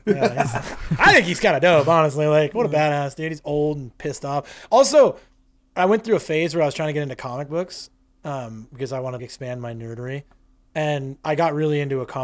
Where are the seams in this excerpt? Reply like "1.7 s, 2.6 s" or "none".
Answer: 9.2 s